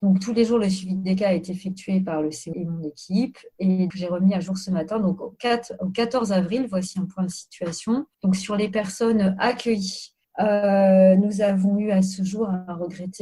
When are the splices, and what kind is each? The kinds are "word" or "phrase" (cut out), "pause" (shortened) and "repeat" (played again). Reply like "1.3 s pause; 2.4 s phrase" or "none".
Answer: 2.5 s phrase; 3.9 s word; 8.1 s pause; 10.2 s pause